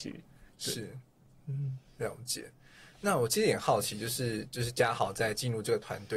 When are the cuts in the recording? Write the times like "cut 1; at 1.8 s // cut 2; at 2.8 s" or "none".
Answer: none